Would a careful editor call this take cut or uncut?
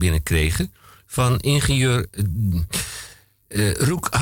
uncut